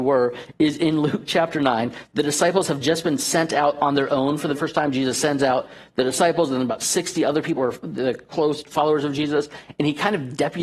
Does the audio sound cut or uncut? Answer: cut